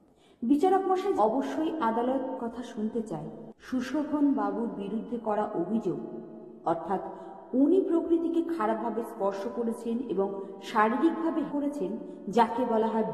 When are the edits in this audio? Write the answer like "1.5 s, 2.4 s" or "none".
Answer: 1.2 s, 2.4 s, 3.6 s, 11.5 s